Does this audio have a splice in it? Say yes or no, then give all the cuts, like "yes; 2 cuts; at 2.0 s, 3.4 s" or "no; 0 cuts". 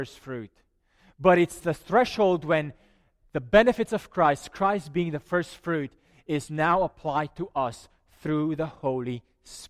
yes; 1 cut; at 1.6 s